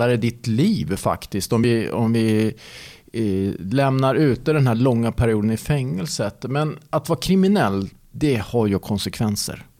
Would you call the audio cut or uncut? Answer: uncut